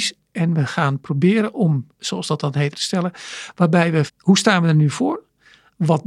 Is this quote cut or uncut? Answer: cut